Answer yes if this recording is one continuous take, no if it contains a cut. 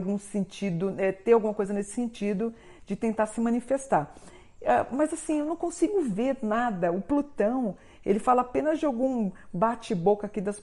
yes